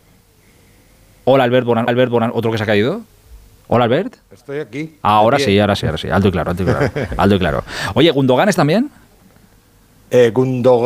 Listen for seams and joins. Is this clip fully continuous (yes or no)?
no